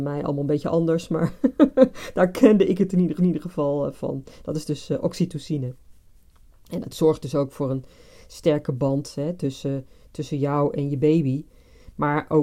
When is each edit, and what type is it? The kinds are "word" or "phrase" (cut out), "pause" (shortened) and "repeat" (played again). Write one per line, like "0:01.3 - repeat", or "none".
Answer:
0:03.2 - repeat